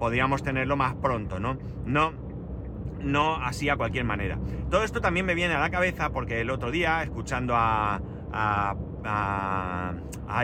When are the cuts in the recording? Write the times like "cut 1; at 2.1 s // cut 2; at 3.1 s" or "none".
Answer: none